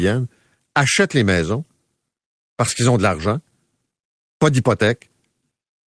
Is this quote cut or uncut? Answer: uncut